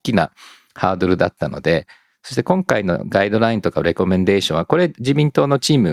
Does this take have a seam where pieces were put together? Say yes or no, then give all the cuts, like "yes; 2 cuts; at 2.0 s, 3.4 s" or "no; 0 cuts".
no; 0 cuts